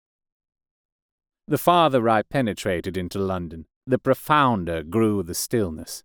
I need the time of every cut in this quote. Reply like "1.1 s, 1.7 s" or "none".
3.8 s